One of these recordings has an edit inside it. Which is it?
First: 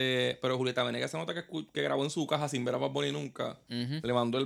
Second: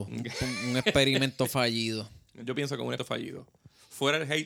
second; 2 cuts; at 2.4 s, 3.0 s

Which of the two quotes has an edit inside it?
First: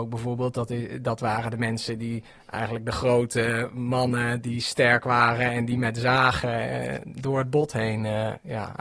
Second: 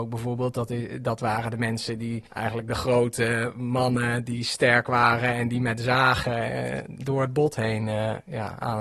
second; 1 cut; at 2.3 s

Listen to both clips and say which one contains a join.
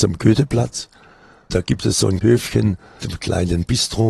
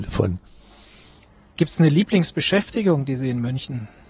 first; 3 cuts; at 1.5 s, 2.2 s, 3.0 s

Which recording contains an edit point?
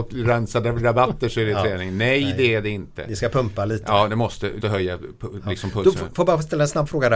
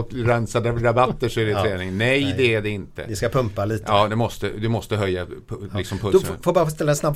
first; 1 cut; at 4.6 s

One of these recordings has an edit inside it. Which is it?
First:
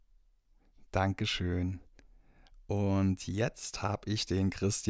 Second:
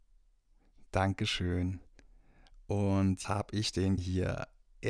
second; 2 cuts; at 3.2 s, 4.0 s

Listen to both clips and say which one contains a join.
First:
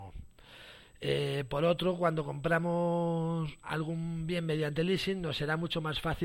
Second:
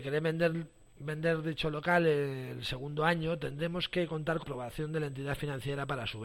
second; 1 cut; at 4.4 s

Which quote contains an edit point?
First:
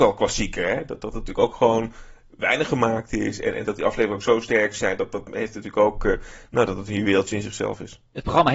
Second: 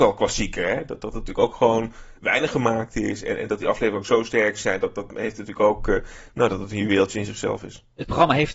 second; 1 cut; at 2.2 s

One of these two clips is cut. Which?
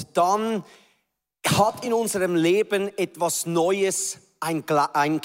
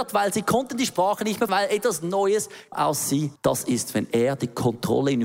second; 3 cuts; at 1.5 s, 2.7 s, 3.3 s

